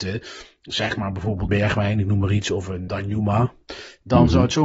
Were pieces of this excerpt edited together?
yes; 2 cuts; at 1.5 s, 2.9 s

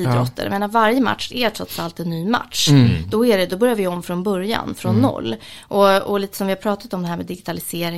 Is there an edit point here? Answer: no; 0 cuts

